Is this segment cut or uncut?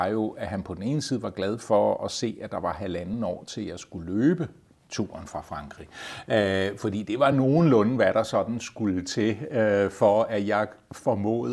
uncut